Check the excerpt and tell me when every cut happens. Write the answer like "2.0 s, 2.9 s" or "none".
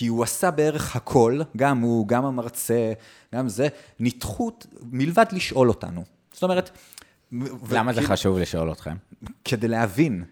none